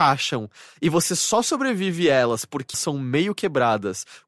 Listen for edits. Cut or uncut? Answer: cut